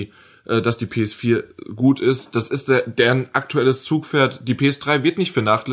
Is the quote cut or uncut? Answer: uncut